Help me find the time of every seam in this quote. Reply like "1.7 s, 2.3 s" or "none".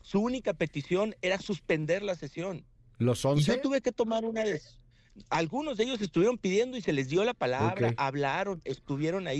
none